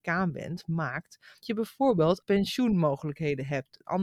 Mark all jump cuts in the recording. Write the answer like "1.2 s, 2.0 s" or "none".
1.4 s, 2.2 s